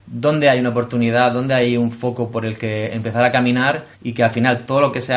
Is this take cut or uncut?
cut